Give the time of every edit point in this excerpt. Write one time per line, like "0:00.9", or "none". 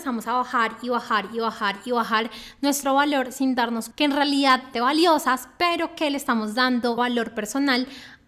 0:03.9
0:04.7
0:07.0